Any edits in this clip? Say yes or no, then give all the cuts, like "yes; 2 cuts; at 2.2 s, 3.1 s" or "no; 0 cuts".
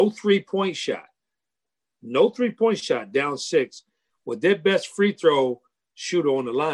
no; 0 cuts